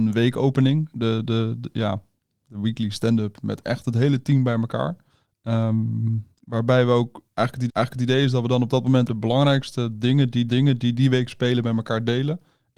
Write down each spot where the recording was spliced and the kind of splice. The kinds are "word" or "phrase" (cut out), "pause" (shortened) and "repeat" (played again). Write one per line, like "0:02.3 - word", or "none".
0:05.1 - pause
0:07.7 - repeat
0:09.1 - word
0:10.5 - repeat